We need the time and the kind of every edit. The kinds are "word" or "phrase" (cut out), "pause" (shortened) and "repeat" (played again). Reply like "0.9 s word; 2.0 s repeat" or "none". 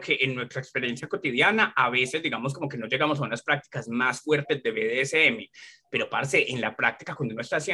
none